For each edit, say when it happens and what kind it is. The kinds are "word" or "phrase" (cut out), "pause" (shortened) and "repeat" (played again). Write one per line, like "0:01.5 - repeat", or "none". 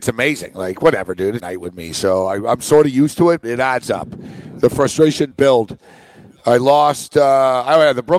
0:01.4 - word
0:03.4 - word
0:05.3 - word